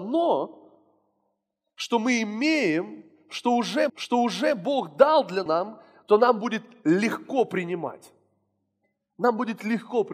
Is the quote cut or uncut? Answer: cut